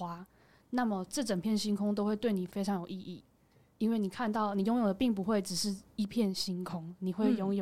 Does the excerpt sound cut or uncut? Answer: uncut